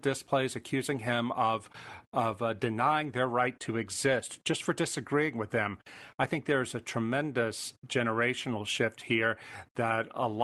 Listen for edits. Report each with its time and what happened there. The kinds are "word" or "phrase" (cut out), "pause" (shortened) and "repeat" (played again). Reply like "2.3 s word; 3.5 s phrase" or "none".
none